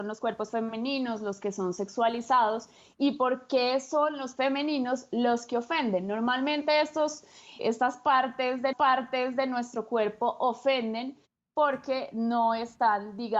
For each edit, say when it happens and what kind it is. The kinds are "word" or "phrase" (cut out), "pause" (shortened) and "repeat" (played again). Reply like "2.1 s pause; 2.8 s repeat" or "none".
4.4 s word; 7.6 s word; 8.7 s repeat